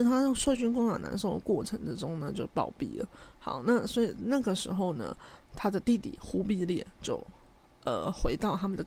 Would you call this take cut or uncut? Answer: uncut